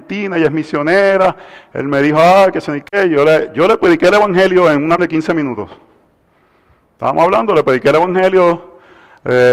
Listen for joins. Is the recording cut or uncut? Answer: cut